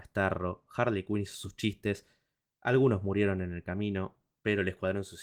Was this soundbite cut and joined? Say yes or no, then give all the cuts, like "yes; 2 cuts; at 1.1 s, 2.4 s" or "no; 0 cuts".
no; 0 cuts